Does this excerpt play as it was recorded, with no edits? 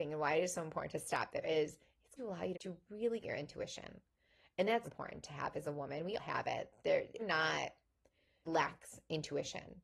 no; 8 cuts; at 1.4 s, 2.2 s, 2.5 s, 3.2 s, 4.8 s, 6.2 s, 7.2 s, 8.5 s

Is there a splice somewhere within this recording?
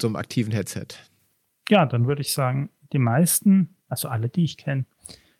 yes; 1 cut; at 3.8 s

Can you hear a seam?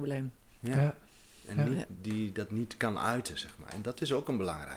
no; 0 cuts

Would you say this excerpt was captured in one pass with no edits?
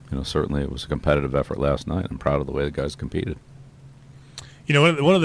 yes; 0 cuts

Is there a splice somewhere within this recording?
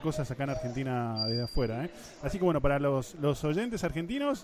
no; 0 cuts

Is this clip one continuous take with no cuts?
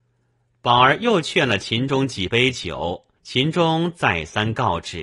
no; 1 cut; at 3.2 s

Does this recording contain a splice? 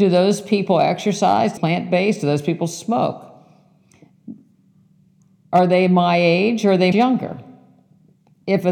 yes; 2 cuts; at 1.6 s, 6.9 s

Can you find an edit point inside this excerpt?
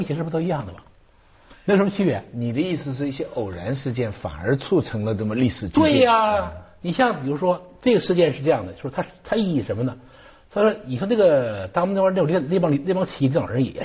no; 0 cuts

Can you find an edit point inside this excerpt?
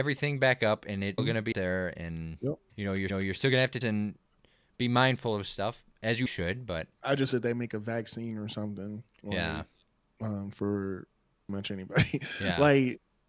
yes; 9 cuts; at 1.2 s, 1.5 s, 2.7 s, 3.1 s, 3.8 s, 6.3 s, 6.9 s, 7.3 s, 11.5 s

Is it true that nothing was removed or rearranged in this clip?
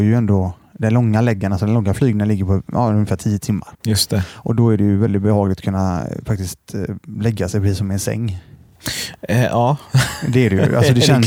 no; 1 cut; at 3.7 s

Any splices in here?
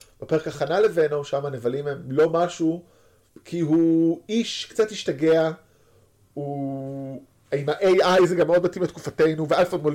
no; 0 cuts

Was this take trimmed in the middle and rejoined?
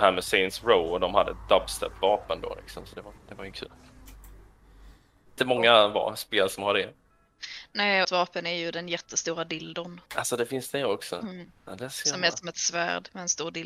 yes; 6 cuts; at 3.2 s, 3.5 s, 5.4 s, 8.0 s, 10.1 s, 11.6 s

